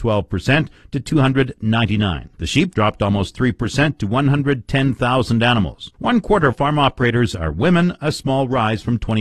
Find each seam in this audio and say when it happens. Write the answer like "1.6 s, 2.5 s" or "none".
2.3 s, 2.7 s, 5.9 s, 6.5 s